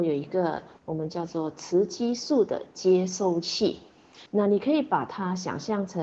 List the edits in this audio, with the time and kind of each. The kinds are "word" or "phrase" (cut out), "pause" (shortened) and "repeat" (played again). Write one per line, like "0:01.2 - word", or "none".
0:04.3 - pause